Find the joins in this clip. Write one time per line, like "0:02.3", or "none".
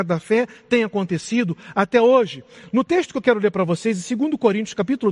none